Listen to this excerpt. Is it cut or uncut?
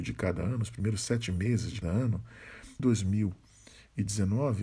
cut